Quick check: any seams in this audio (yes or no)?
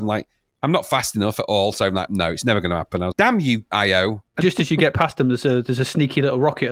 yes